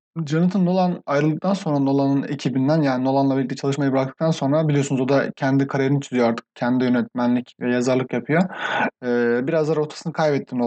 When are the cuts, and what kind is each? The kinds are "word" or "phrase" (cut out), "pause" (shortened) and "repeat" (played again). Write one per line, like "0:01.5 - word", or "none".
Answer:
none